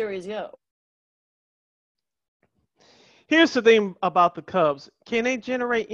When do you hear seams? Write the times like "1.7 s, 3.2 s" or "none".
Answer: none

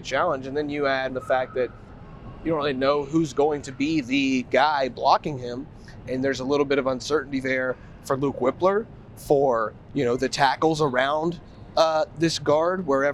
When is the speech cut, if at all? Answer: 1.1 s

